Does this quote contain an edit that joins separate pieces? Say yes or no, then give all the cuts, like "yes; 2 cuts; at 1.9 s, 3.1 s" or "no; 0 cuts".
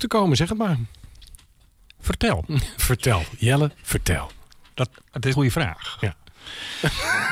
yes; 1 cut; at 5.3 s